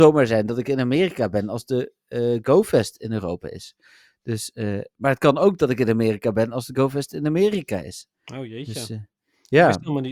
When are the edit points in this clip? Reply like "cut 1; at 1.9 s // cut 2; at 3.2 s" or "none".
none

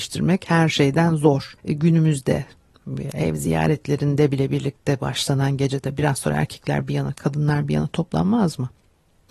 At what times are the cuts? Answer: cut 1; at 1.6 s

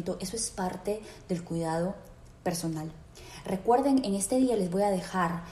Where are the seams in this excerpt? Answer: none

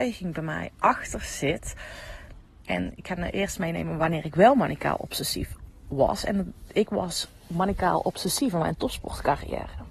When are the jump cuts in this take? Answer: none

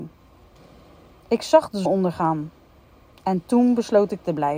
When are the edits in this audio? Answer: cut 1; at 1.9 s

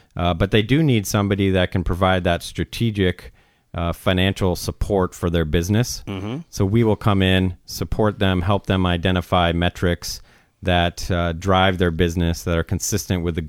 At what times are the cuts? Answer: none

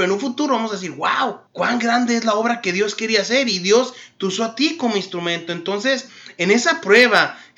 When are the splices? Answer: cut 1; at 1.5 s

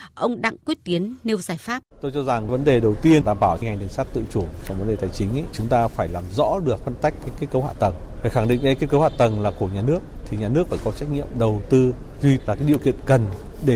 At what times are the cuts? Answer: cut 1; at 1.9 s // cut 2; at 5.5 s // cut 3; at 12.4 s

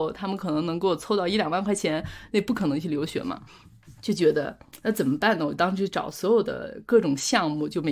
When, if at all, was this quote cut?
cut 1; at 4.0 s

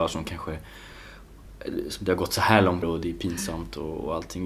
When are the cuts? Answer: cut 1; at 2.8 s

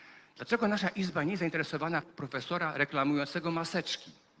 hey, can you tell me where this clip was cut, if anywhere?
cut 1; at 2.0 s

